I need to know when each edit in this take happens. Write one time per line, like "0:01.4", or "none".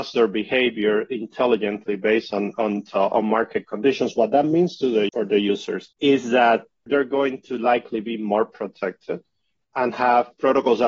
0:06.0